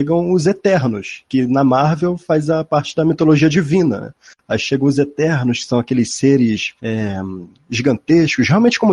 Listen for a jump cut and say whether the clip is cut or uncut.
cut